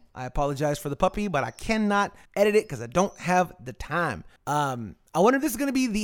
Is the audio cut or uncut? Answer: cut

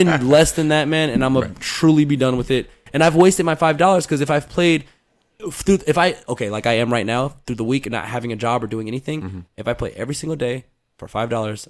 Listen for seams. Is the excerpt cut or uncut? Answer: uncut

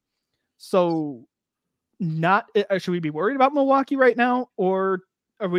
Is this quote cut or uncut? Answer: uncut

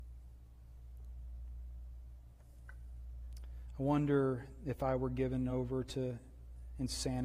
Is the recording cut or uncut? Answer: uncut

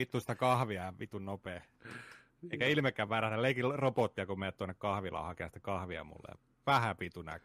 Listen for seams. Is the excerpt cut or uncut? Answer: uncut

